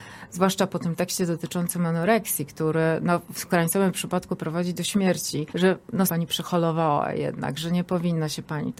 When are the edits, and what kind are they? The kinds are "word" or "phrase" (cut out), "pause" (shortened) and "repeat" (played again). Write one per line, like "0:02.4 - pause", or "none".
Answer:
0:05.5 - pause
0:06.1 - phrase

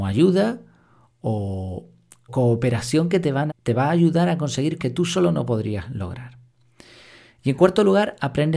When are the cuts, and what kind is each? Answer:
0:02.3 - word
0:03.5 - word
0:04.8 - word

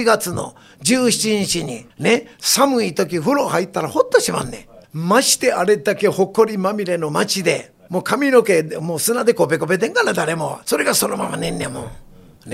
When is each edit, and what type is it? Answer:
0:01.9 - pause
0:04.8 - pause
0:07.9 - phrase
0:10.6 - pause

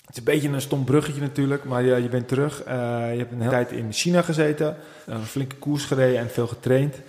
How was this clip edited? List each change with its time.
0:03.5 - word
0:05.0 - pause

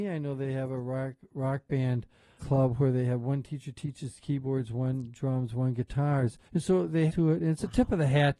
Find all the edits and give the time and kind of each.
0:02.4 - word
0:06.5 - pause
0:07.1 - phrase

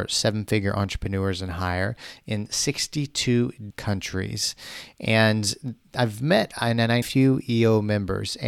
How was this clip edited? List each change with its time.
0:03.7 - word
0:07.0 - phrase

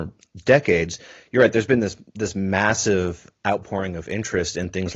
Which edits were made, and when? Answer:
none

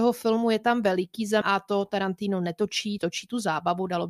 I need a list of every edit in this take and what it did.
0:01.4 - word
0:03.0 - phrase

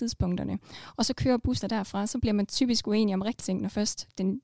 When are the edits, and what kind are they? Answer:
0:01.6 - word
0:03.4 - word

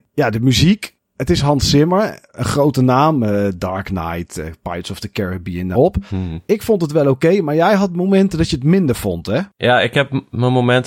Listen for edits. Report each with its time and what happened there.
0:05.7 - phrase

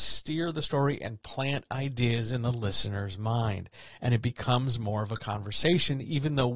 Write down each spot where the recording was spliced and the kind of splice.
none

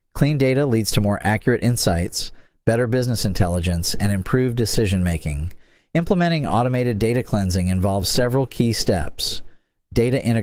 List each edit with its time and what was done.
none

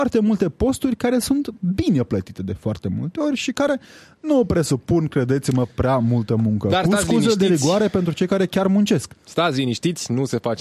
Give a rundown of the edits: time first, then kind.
none

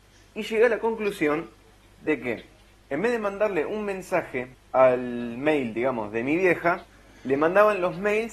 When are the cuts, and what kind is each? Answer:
0:02.7 - pause
0:04.5 - pause

